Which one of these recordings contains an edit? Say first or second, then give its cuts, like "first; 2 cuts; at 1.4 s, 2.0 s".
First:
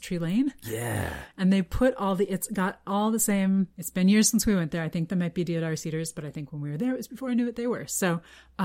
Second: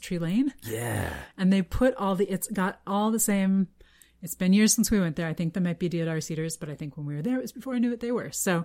first; 1 cut; at 3.7 s